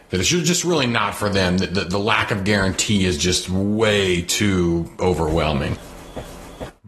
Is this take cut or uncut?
uncut